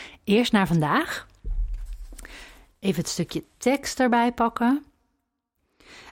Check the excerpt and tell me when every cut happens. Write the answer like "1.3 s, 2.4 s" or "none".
none